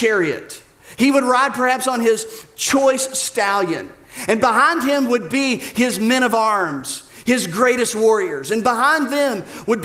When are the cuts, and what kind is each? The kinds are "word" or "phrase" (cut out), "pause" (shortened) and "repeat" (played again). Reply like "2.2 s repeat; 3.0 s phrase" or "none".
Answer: none